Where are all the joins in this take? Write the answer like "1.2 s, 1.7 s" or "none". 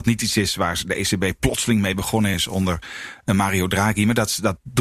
none